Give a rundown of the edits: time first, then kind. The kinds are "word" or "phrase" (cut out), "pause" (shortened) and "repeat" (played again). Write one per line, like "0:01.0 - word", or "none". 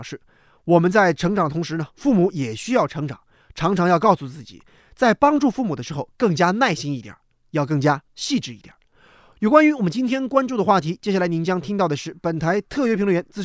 none